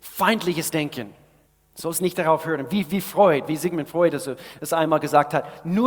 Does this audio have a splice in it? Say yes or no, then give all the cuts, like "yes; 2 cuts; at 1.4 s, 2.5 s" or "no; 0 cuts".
yes; 1 cut; at 1.5 s